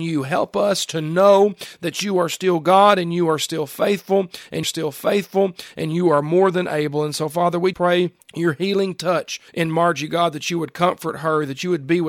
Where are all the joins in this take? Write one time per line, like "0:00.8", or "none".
0:04.6
0:07.7
0:08.2
0:09.5

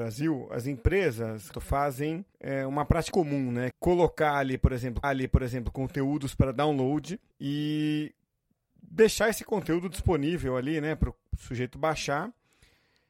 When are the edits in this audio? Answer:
0:01.5
0:02.3
0:03.1
0:03.7
0:05.0
0:07.3

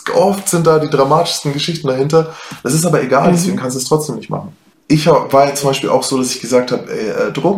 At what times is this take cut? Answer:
none

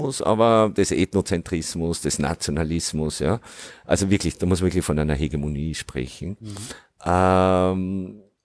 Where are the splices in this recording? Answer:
none

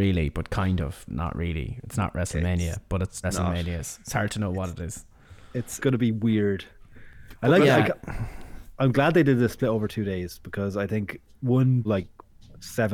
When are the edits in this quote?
0:01.1
0:03.2
0:05.8
0:11.8

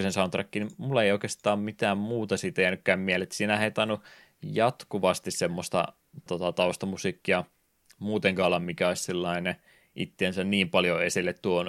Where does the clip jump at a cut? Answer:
0:06.3

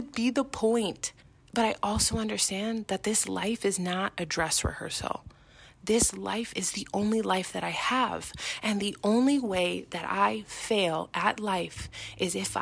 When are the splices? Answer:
0:01.2

